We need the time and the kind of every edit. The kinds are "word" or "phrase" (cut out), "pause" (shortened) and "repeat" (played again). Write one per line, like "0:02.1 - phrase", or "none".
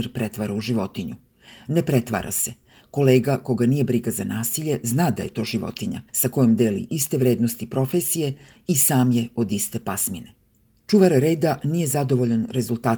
0:06.1 - pause
0:10.6 - pause